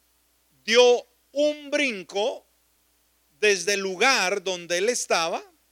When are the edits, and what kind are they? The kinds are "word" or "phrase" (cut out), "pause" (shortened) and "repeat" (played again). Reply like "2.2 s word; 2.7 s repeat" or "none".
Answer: none